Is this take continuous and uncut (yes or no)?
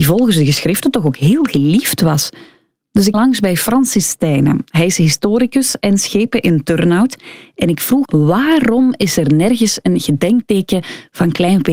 no